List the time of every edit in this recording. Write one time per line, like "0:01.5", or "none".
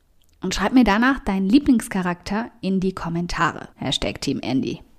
0:03.7